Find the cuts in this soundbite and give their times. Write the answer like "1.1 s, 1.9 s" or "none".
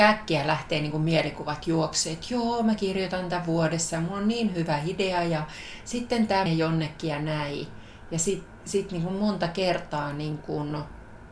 6.5 s